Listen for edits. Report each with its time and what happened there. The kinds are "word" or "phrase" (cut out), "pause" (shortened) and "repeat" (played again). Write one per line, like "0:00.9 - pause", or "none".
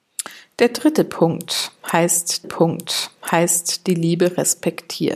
0:02.4 - repeat

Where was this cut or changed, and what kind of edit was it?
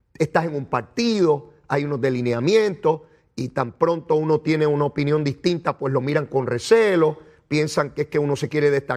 none

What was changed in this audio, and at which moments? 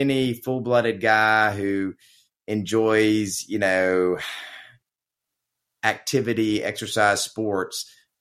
none

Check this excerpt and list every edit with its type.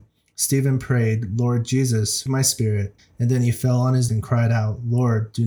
0:02.3 - word
0:03.0 - pause
0:04.1 - word

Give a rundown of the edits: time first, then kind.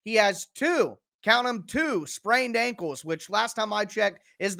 none

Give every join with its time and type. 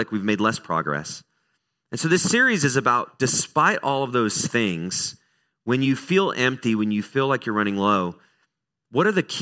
none

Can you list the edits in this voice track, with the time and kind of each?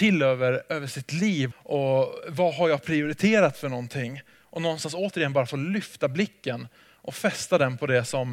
0:01.5 - word

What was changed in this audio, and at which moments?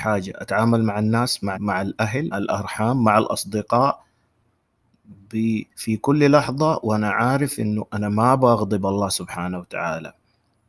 0:01.5 - word
0:02.3 - word
0:05.7 - pause

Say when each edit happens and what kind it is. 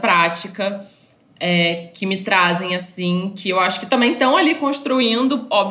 none

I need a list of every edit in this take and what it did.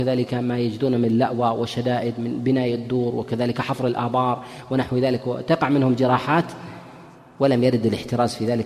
none

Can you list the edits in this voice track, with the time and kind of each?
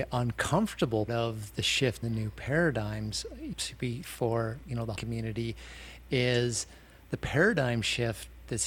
0:01.1 - word
0:02.0 - word
0:03.5 - word
0:04.0 - word
0:04.6 - word
0:05.0 - word

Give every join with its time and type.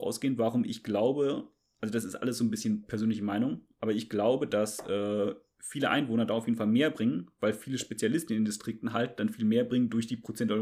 none

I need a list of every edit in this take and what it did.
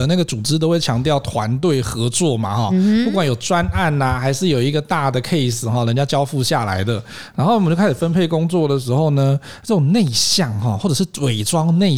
none

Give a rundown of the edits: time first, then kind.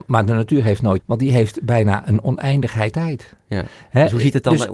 0:01.0 - word
0:02.9 - word

